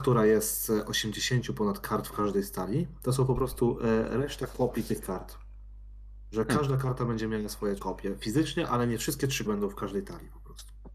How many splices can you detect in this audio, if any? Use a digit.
2